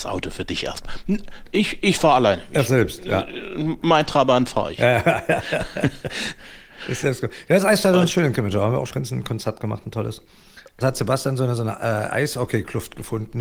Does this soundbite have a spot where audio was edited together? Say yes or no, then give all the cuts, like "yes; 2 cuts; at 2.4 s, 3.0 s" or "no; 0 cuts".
yes; 3 cuts; at 2.6 s, 8.9 s, 10.8 s